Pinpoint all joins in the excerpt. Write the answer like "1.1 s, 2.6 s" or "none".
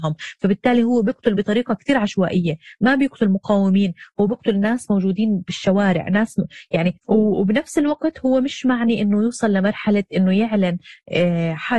none